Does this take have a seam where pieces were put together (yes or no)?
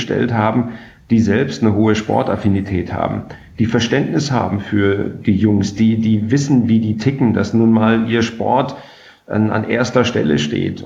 no